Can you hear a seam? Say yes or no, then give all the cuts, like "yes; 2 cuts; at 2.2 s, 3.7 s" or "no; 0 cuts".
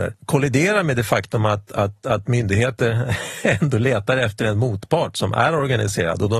no; 0 cuts